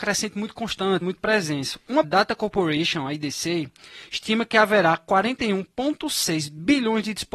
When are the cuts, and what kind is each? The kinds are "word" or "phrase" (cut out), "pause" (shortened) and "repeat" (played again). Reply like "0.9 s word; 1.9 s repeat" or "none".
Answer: 1.0 s word; 2.0 s phrase